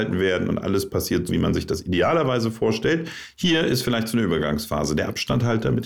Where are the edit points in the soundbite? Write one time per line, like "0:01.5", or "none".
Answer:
0:01.3